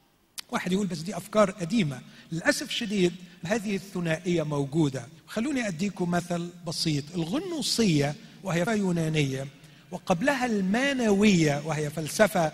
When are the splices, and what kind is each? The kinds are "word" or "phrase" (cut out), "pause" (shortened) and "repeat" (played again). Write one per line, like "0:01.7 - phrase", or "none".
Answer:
0:03.4 - phrase
0:05.2 - pause
0:08.7 - word